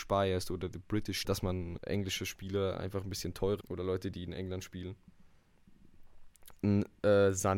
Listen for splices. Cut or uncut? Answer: cut